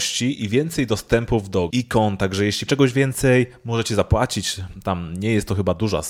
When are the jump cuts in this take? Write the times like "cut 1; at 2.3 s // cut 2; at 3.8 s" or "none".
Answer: cut 1; at 1.7 s // cut 2; at 2.7 s